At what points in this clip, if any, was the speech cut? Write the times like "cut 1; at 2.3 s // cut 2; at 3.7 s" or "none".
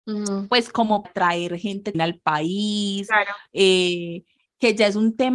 cut 1; at 1.0 s // cut 2; at 1.9 s